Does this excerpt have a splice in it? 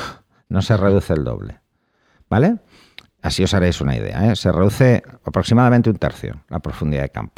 no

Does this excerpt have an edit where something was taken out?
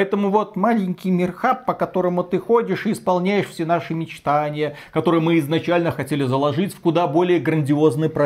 no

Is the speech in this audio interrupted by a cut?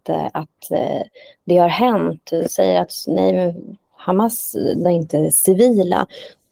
yes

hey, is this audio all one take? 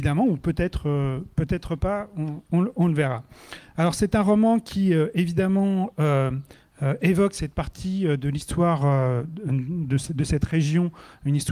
yes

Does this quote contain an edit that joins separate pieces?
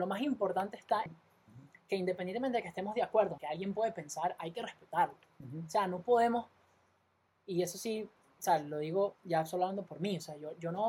yes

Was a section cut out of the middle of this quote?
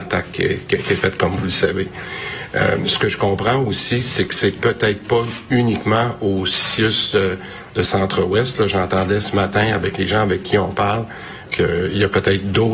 yes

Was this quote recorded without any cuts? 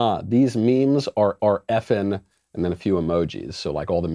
no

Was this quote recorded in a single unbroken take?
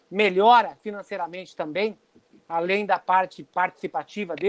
yes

